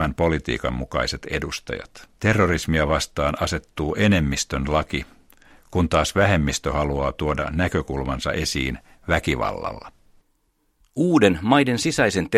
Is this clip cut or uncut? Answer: cut